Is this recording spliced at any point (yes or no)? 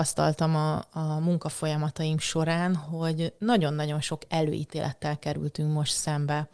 no